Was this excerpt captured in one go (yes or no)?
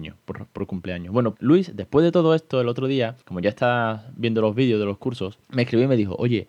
no